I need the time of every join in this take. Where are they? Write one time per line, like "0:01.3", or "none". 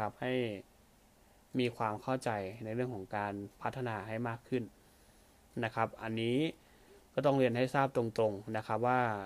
none